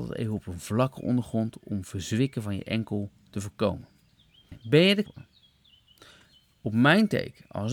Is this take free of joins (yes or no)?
no